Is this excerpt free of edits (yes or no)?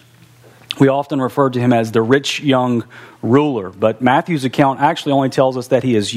yes